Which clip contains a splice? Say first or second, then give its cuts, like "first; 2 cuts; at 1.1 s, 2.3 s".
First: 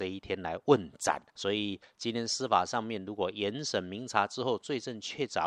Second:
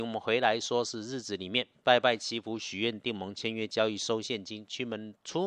first; 1 cut; at 1.3 s